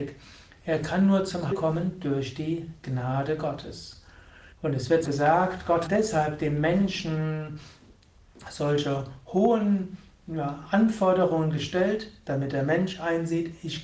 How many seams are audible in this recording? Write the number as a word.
four